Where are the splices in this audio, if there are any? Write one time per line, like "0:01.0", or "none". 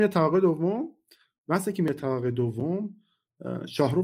none